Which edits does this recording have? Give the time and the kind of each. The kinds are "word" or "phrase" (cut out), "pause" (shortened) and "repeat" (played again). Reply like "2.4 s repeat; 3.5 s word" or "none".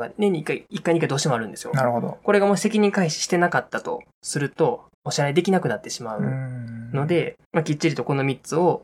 4.9 s pause; 7.4 s pause